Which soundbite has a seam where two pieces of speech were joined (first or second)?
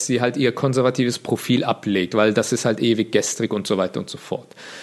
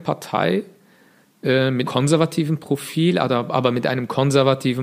second